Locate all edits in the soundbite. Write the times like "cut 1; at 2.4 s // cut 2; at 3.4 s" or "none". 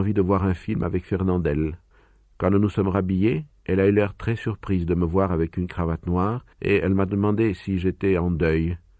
cut 1; at 1.9 s // cut 2; at 6.5 s